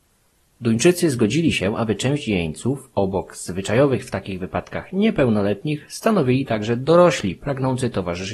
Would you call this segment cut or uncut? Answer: uncut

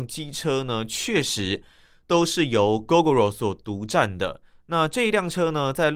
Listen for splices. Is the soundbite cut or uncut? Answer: uncut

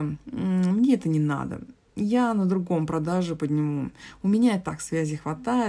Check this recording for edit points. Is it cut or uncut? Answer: uncut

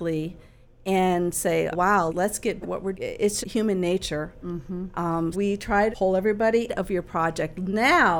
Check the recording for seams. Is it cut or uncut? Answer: cut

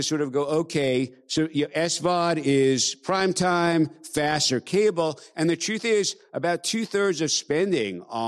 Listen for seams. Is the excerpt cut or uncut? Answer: uncut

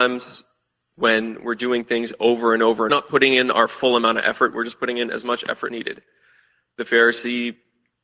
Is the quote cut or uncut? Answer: cut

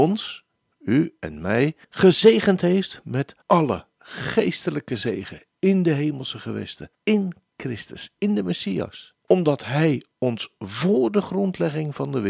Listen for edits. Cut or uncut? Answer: cut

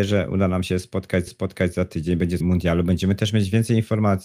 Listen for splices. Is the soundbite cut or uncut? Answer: cut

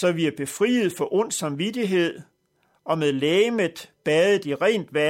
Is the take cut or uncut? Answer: uncut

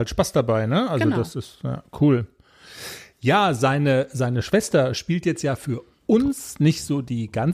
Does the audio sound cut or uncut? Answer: uncut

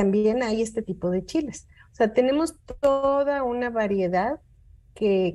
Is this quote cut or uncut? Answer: uncut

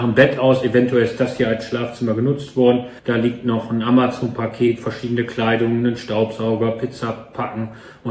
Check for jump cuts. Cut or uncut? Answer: cut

